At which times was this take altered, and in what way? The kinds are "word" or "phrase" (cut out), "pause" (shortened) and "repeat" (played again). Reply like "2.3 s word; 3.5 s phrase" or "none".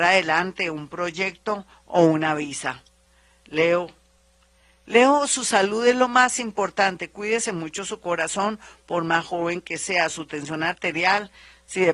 none

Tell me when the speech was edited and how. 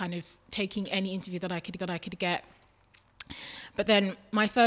1.8 s repeat

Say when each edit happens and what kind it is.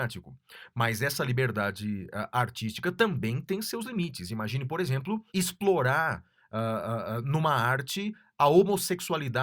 5.3 s pause

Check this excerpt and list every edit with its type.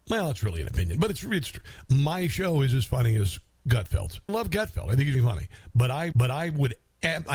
4.3 s phrase; 5.1 s word; 6.1 s repeat

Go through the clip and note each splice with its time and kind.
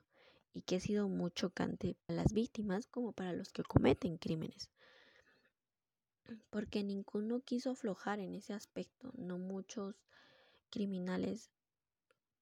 2.1 s word

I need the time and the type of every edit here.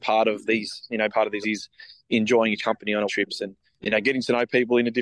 1.1 s word; 1.4 s word; 2.6 s word; 3.1 s word; 3.8 s word

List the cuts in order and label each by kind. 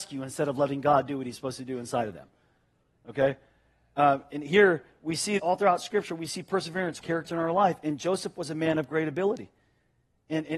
5.4 s word; 7.0 s word

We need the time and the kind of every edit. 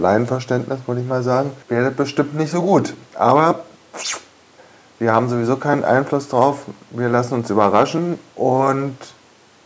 1.6 s pause

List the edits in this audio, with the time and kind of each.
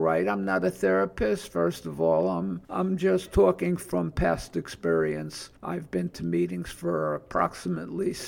2.6 s pause; 5.6 s pause

